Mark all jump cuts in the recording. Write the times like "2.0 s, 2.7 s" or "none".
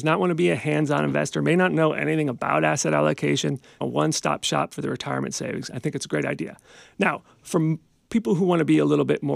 3.8 s

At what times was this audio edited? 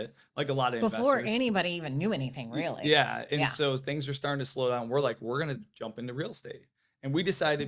none

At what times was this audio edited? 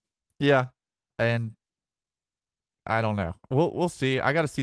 1.1 s

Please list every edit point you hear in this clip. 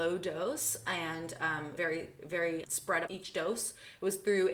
1.8 s, 2.6 s, 3.1 s

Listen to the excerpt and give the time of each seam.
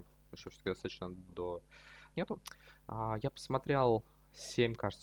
1.3 s, 2.1 s

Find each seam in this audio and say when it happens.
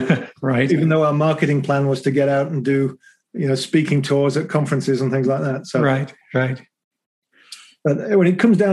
none

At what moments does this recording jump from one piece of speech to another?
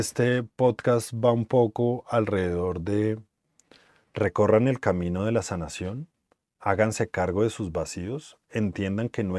none

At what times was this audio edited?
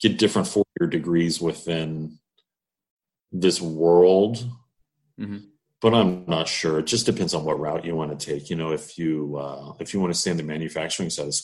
none

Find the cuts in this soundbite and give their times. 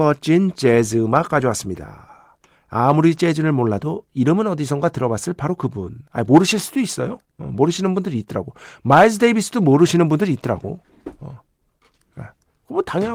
2.5 s, 6.1 s

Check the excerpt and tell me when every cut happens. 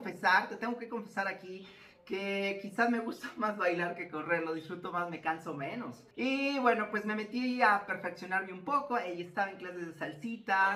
6.1 s

